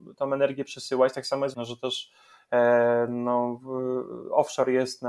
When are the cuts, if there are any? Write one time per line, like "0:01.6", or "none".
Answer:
0:01.5